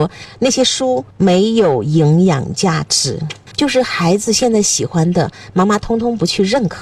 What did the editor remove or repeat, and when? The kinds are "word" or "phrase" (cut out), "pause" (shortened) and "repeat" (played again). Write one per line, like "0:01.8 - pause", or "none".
0:01.1 - pause